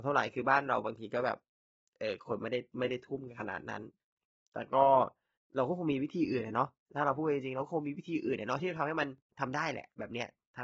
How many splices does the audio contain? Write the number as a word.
two